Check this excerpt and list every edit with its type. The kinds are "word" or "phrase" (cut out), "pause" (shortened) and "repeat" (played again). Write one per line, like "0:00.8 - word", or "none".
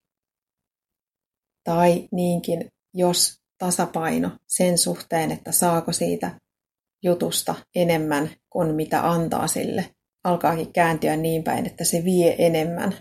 0:04.4 - pause
0:07.7 - pause
0:10.1 - pause